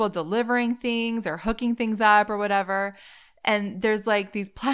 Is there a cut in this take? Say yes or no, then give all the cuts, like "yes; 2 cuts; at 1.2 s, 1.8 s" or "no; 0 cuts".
no; 0 cuts